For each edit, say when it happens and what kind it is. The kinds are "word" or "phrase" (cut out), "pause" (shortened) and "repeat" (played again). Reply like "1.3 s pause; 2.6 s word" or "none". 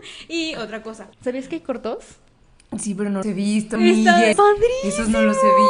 1.1 s pause; 3.2 s word; 3.8 s phrase; 4.3 s word

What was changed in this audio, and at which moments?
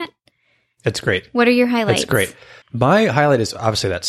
2.6 s pause

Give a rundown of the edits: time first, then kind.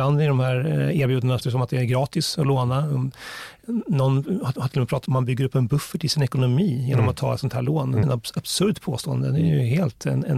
1.4 s word; 4.6 s repeat; 5.1 s phrase; 8.0 s word

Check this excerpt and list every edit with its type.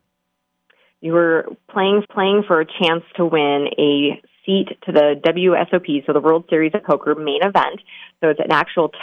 2.0 s repeat

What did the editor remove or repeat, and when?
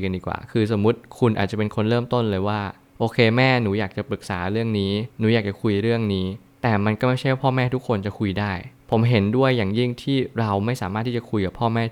5.1 s pause

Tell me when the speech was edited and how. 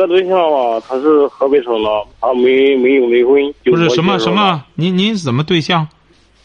2.1 s pause; 3.6 s pause

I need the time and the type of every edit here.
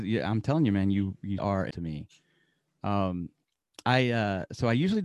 1.4 s word; 1.7 s word

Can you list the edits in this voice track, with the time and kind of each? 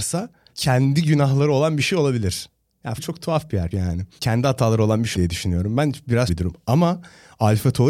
3.0 s word; 3.7 s word; 5.1 s word; 6.3 s word

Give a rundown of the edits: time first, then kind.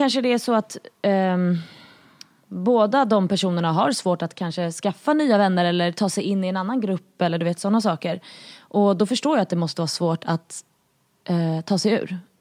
none

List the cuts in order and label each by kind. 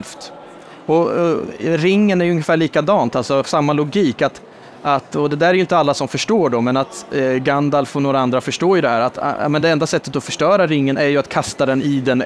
none

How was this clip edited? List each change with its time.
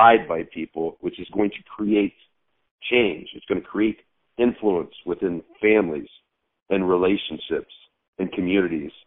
none

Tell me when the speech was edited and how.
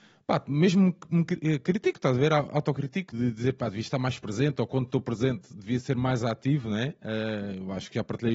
3.1 s word

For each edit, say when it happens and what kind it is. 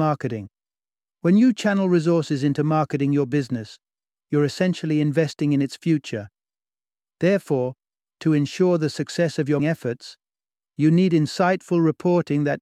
9.6 s word

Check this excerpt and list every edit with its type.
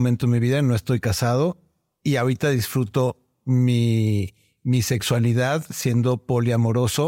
none

